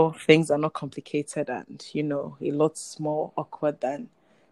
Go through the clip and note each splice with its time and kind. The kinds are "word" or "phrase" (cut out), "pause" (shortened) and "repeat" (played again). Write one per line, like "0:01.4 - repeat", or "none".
none